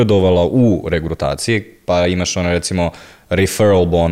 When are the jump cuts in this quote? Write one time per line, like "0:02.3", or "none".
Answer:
none